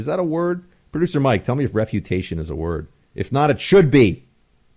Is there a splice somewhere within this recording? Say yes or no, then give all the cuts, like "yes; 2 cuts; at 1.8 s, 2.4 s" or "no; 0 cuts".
no; 0 cuts